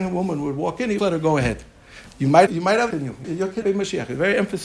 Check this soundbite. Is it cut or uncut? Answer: cut